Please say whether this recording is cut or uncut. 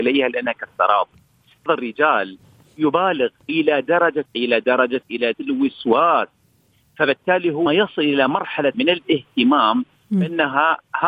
cut